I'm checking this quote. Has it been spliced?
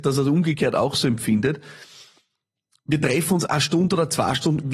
no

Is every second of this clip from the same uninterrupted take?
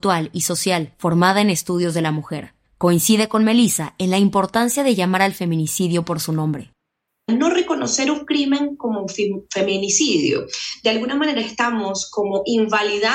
yes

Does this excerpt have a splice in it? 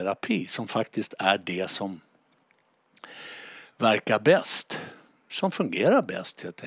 no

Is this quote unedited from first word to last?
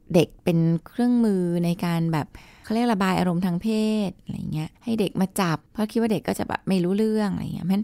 no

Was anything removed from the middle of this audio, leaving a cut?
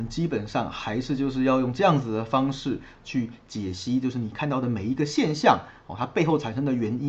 no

